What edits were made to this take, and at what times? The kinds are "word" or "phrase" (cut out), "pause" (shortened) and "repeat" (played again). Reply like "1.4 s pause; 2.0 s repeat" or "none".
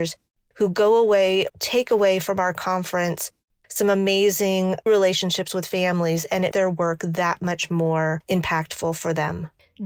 1.5 s word; 4.9 s word; 6.5 s word